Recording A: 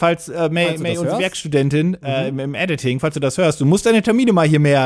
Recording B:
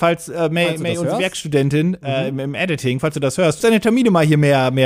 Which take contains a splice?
B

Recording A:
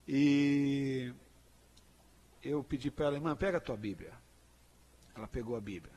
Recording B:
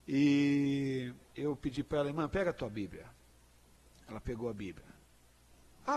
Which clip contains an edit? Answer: B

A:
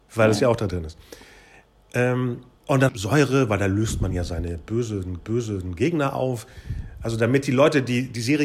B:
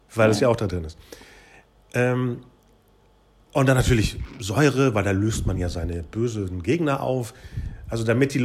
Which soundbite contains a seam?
A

